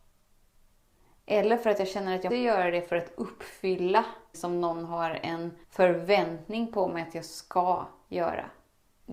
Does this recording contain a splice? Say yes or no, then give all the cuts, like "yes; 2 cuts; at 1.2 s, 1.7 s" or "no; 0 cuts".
yes; 3 cuts; at 2.3 s, 4.3 s, 5.6 s